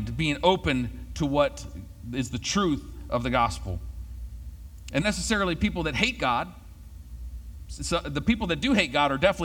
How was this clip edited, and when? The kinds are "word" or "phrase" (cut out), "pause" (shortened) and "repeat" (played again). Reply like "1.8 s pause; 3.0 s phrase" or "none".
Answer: 5.0 s phrase